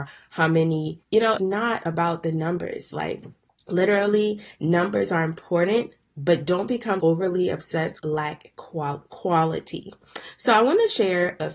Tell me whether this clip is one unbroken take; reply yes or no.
no